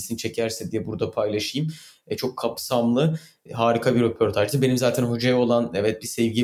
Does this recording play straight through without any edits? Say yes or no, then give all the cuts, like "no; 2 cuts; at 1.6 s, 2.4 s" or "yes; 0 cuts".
yes; 0 cuts